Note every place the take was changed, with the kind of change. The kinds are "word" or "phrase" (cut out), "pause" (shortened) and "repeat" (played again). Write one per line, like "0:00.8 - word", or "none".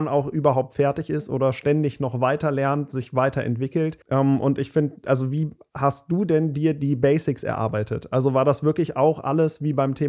0:04.0 - pause

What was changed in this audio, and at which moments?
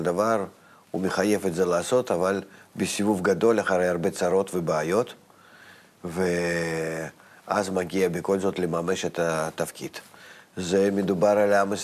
none

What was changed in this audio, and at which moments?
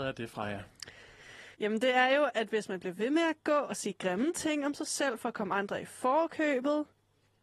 0:01.5 - pause

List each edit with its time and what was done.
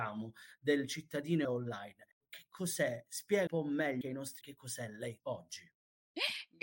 0:01.4 - word
0:03.5 - word
0:04.0 - word
0:04.4 - word
0:05.2 - word

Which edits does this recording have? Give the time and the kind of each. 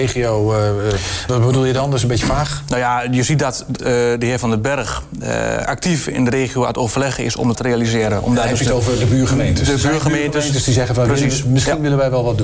0:01.3 - word
0:03.8 - phrase
0:07.5 - word

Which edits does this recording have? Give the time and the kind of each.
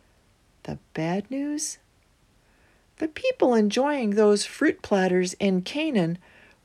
none

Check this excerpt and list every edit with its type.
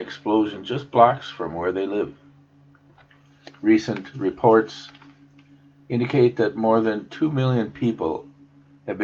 none

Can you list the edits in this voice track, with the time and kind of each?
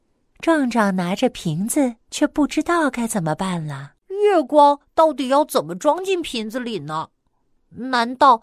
0:02.0 - pause
0:04.0 - pause

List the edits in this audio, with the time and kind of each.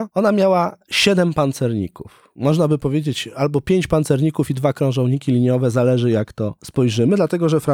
none

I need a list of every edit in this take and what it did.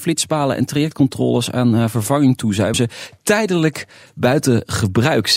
0:02.7 - word

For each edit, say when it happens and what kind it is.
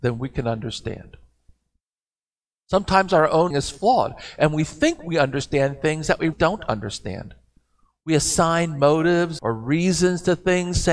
0:03.5 - word
0:06.3 - word
0:09.4 - word

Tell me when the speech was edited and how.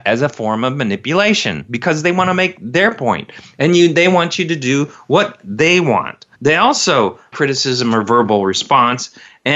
0:06.3 - pause
0:07.3 - phrase

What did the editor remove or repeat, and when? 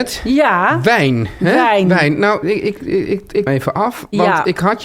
0:02.4 - word
0:02.8 - word
0:03.5 - phrase

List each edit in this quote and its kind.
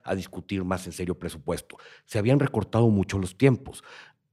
none

